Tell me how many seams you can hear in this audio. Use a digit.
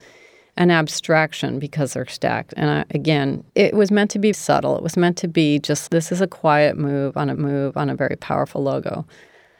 4